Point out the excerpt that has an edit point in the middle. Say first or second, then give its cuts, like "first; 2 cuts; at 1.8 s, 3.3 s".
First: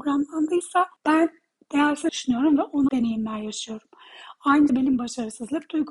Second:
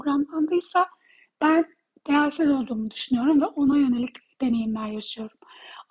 first; 4 cuts; at 1.0 s, 2.1 s, 2.9 s, 4.7 s